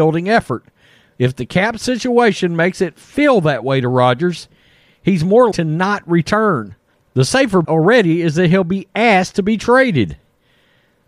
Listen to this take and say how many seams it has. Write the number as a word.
two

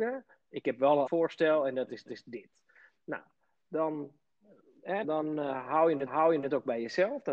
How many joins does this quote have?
four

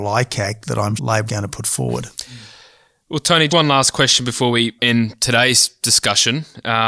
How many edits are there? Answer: four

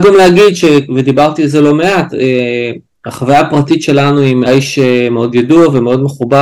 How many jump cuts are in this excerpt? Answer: one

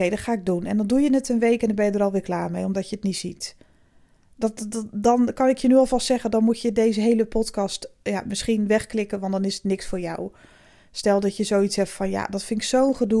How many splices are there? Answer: zero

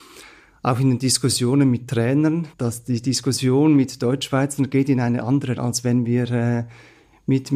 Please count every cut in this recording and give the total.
two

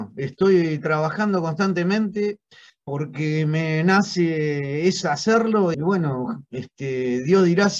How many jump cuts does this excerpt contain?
two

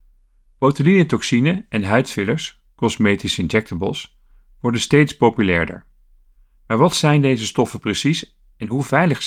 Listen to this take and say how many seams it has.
zero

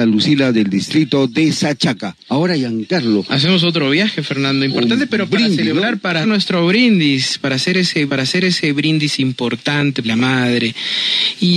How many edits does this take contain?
four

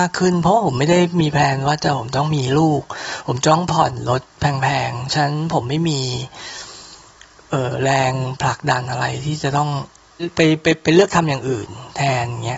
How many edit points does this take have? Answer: zero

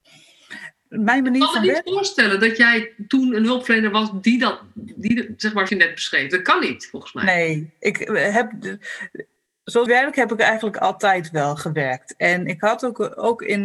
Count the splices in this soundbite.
two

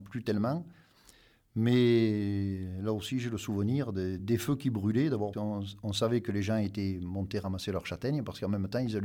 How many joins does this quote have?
two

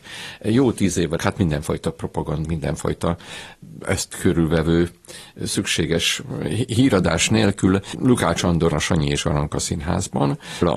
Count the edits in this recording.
three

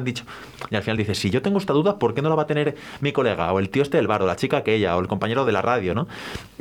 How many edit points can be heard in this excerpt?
zero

